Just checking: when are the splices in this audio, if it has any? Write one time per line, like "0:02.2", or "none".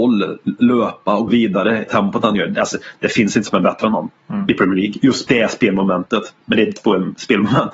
0:01.3
0:01.9
0:03.5
0:04.2
0:05.3
0:06.4
0:06.8